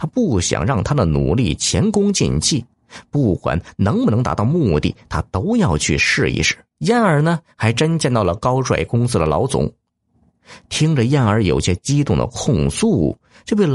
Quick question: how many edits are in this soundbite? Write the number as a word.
one